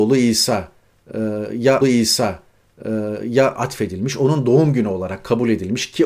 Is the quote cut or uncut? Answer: cut